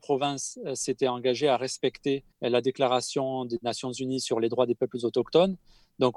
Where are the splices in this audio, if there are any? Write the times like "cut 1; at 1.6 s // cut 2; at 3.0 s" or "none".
cut 1; at 2.3 s